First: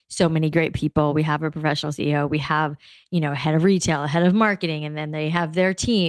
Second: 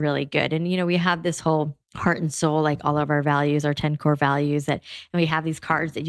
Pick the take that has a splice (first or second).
second